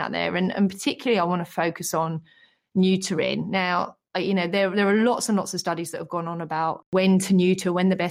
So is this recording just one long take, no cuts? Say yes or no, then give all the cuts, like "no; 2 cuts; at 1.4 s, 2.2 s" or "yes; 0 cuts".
yes; 0 cuts